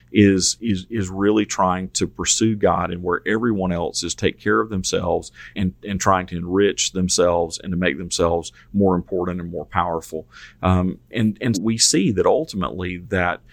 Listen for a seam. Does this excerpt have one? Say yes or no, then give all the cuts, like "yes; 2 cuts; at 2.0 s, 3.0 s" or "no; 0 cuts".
yes; 4 cuts; at 4.1 s, 5.5 s, 11.1 s, 11.5 s